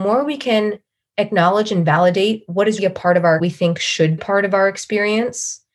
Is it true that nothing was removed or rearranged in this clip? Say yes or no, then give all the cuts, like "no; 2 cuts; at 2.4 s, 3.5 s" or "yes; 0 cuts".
no; 3 cuts; at 2.8 s, 3.4 s, 4.2 s